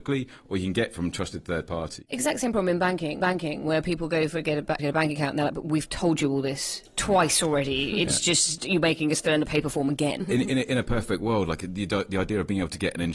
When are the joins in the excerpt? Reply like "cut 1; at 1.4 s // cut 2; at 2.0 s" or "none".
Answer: cut 1; at 3.2 s // cut 2; at 4.8 s // cut 3; at 10.2 s